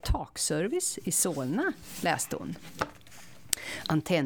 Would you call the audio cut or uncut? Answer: uncut